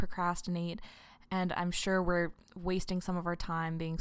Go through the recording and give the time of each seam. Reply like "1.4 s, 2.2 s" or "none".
none